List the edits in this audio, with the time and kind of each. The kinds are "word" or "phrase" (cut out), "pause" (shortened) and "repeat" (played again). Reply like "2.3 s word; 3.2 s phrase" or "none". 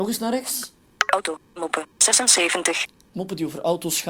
1.6 s word